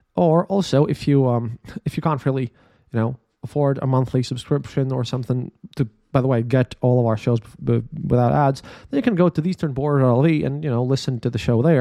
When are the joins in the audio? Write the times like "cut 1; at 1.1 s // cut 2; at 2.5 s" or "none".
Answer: none